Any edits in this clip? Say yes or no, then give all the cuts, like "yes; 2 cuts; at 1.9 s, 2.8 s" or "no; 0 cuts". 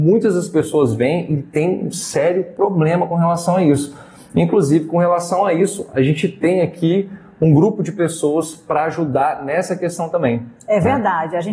no; 0 cuts